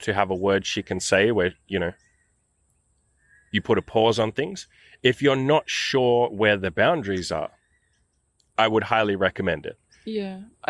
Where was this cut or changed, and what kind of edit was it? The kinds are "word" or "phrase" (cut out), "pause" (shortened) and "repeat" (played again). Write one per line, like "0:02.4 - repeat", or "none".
none